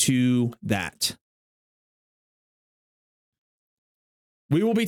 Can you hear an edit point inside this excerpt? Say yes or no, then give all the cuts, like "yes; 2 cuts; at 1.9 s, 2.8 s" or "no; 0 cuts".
no; 0 cuts